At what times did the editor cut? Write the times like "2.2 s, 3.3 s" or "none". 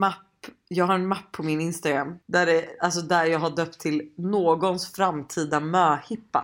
2.2 s